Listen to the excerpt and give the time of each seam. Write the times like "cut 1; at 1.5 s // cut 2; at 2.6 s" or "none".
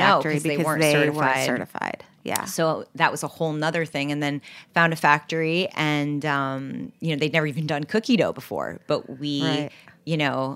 none